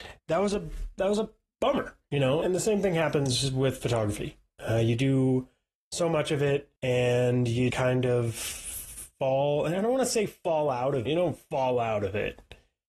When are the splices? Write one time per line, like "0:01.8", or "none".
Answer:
0:02.4
0:06.8
0:07.7
0:11.1

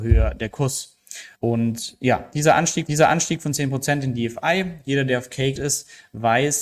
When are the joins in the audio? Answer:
0:01.3
0:02.9
0:05.5

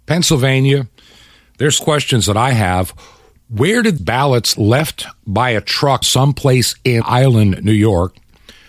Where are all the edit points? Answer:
0:01.8
0:04.0
0:04.6
0:06.0
0:07.0

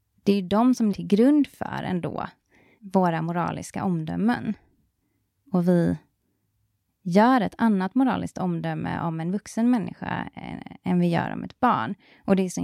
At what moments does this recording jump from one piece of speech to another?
0:00.9
0:02.8

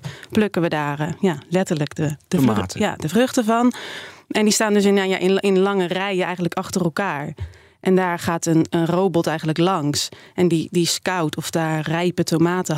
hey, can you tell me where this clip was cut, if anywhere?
none

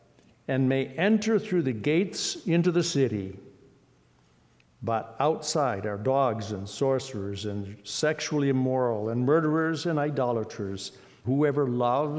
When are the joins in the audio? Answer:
0:11.2

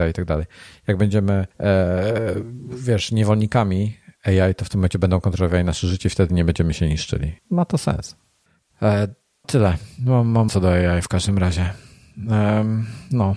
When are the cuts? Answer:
0:01.5
0:07.4
0:09.4
0:10.5

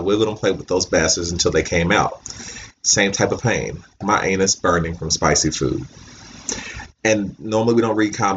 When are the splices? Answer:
0:03.4
0:04.0

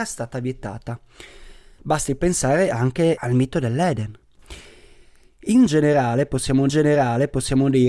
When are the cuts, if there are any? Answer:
0:03.2
0:06.7

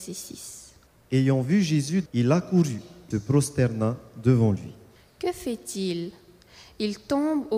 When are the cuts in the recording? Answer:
0:02.1
0:03.1

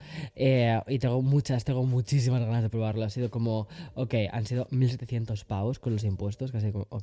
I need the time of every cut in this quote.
none

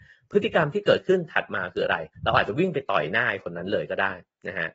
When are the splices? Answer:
0:02.1

